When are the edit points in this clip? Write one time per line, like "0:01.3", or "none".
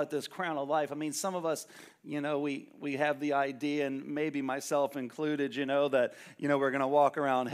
none